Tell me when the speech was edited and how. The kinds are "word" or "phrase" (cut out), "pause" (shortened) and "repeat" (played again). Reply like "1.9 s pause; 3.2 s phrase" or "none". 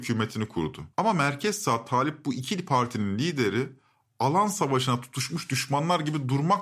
0.9 s pause